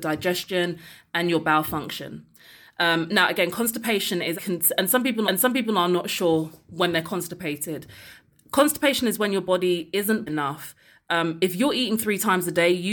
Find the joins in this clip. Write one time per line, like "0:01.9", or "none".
0:04.3
0:05.2
0:10.3